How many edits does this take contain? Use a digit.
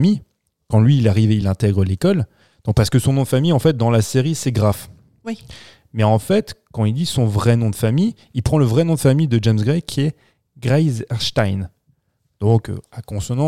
0